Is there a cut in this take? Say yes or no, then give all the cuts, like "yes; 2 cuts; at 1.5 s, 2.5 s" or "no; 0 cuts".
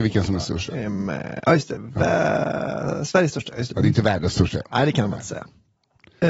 no; 0 cuts